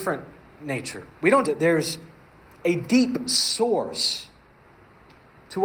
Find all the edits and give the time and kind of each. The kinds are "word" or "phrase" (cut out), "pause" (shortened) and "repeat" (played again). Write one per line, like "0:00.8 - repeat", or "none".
0:01.1 - pause
0:01.4 - word